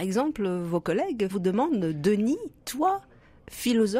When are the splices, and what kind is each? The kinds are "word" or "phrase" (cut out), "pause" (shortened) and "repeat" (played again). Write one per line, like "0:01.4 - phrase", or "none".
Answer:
0:01.3 - word